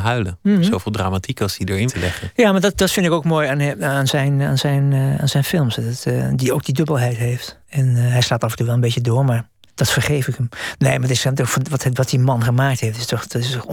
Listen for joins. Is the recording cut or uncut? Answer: cut